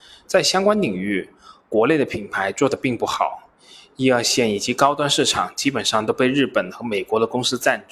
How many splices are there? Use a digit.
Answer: 0